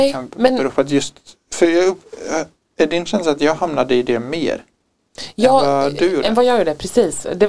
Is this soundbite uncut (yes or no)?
yes